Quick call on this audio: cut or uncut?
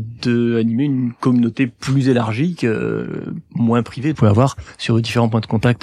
cut